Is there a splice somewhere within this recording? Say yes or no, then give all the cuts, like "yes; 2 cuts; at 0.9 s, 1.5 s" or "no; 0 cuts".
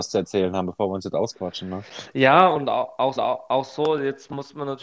yes; 1 cut; at 3.2 s